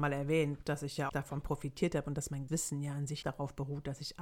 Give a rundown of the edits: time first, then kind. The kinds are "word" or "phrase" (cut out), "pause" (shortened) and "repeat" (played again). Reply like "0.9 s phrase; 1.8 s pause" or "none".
1.1 s word; 2.5 s word; 3.2 s word